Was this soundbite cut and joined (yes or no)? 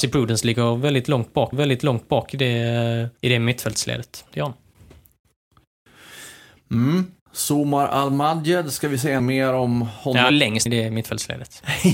yes